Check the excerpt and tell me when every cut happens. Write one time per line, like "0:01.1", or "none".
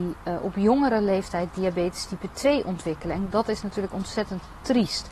none